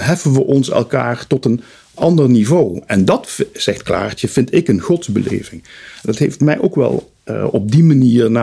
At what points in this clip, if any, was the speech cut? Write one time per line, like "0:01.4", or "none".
none